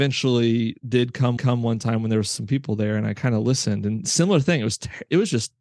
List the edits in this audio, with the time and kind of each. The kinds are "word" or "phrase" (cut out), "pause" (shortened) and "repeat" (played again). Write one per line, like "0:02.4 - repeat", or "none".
0:01.4 - repeat